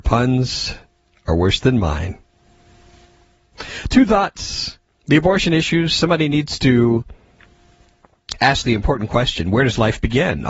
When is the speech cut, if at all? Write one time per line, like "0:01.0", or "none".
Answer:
none

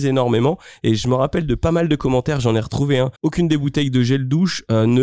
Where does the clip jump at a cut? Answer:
0:03.2

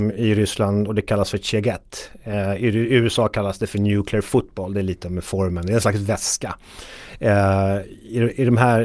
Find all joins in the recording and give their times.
none

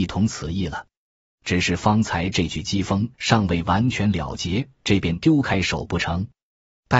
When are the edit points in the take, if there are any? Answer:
0:03.1
0:04.7

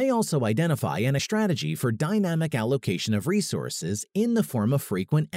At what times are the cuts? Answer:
0:01.2

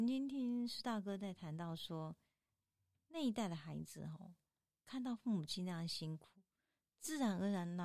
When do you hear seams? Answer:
none

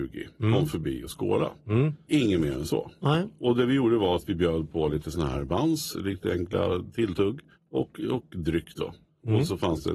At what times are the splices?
0:07.6

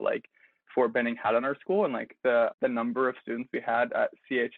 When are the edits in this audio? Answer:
none

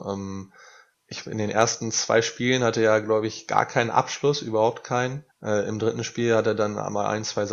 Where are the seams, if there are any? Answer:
0:05.3

